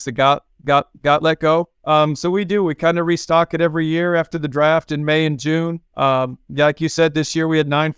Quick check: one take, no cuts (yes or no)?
no